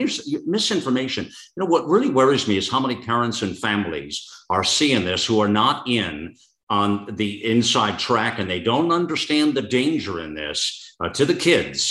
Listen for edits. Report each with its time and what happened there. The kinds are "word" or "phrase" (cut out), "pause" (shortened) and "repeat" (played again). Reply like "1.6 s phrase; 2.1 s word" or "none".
none